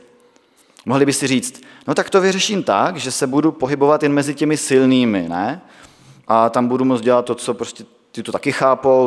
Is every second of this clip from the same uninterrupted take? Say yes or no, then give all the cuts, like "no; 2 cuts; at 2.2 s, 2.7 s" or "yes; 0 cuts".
yes; 0 cuts